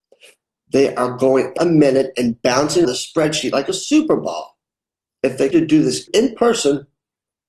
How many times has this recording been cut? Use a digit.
4